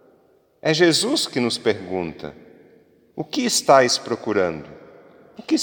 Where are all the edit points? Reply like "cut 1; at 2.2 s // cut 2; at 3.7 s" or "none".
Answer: none

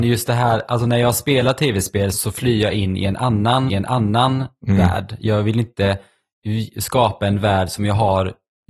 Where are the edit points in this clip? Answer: cut 1; at 2.1 s // cut 2; at 3.7 s

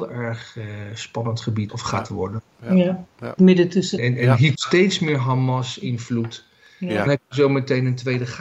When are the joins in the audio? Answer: cut 1; at 1.7 s // cut 2; at 3.4 s // cut 3; at 4.0 s // cut 4; at 4.5 s // cut 5; at 7.1 s

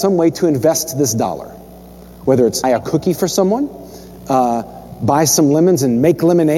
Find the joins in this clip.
cut 1; at 2.6 s

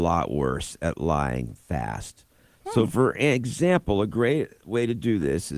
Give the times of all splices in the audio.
none

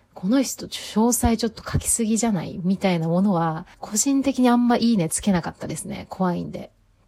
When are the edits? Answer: cut 1; at 3.7 s

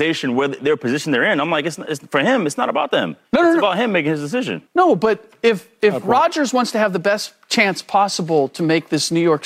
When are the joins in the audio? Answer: cut 1; at 3.2 s // cut 2; at 4.7 s // cut 3; at 7.4 s

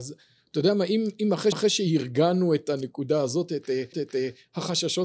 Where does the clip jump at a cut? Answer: cut 1; at 1.5 s // cut 2; at 3.9 s

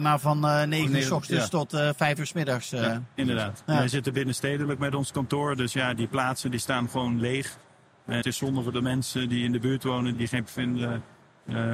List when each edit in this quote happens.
cut 1; at 5.9 s // cut 2; at 8.2 s // cut 3; at 10.1 s // cut 4; at 10.5 s

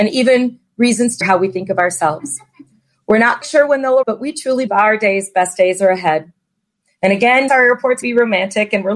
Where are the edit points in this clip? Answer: cut 1; at 1.2 s // cut 2; at 3.4 s // cut 3; at 4.0 s // cut 4; at 4.7 s // cut 5; at 7.5 s // cut 6; at 8.0 s

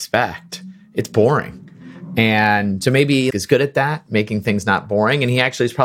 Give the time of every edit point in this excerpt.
cut 1; at 3.3 s

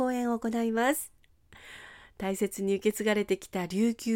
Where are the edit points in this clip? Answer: none

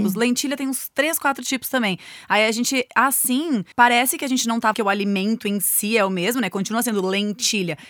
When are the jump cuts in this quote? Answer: cut 1; at 3.7 s // cut 2; at 4.7 s

